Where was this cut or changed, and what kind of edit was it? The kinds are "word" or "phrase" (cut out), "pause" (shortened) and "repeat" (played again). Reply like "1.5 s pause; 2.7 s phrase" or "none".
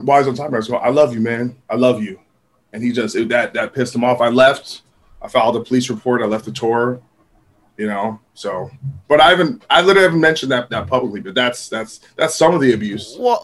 1.6 s pause; 10.7 s word